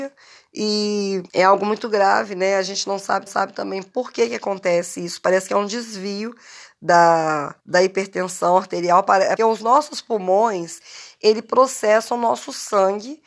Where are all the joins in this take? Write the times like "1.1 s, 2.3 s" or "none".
1.3 s, 3.3 s, 7.6 s, 9.4 s